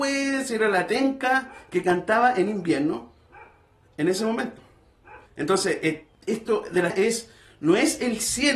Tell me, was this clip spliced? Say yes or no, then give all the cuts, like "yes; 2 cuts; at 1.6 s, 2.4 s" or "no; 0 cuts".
yes; 2 cuts; at 5.3 s, 6.9 s